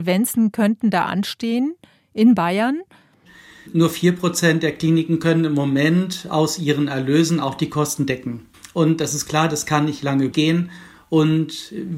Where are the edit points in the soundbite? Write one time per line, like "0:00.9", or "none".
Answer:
0:10.3